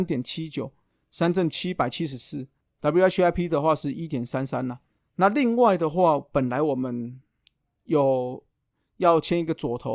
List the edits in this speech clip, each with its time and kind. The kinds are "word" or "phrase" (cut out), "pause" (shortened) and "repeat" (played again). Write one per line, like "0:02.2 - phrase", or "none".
none